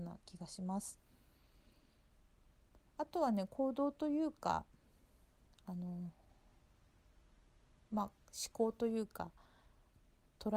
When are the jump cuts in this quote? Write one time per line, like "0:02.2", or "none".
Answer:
0:02.9